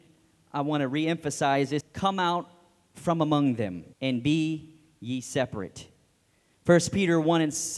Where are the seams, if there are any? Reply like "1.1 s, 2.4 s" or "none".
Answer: 1.8 s, 3.9 s